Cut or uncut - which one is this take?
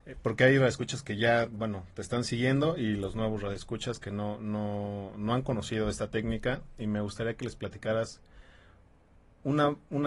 uncut